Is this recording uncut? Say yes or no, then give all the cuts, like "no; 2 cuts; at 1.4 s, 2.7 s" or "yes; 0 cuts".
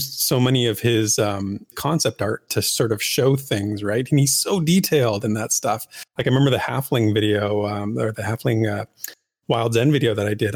no; 2 cuts; at 1.7 s, 6.1 s